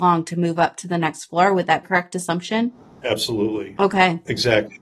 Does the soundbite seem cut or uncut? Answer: cut